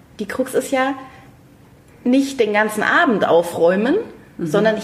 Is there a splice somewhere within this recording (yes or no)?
no